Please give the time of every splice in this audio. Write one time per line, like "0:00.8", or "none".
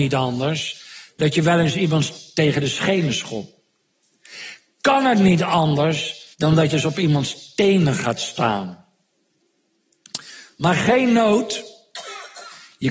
0:06.3
0:06.7